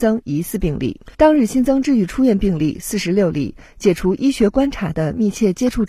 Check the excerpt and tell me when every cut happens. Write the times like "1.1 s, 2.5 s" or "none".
1.1 s

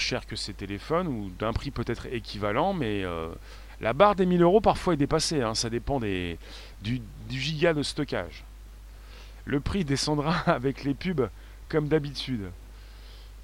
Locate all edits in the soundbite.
none

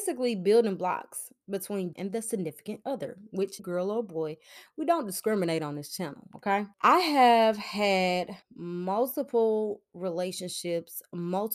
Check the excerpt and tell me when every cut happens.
1.9 s, 3.6 s, 6.7 s, 8.4 s

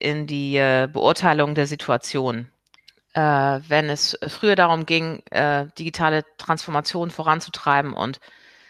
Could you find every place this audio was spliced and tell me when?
none

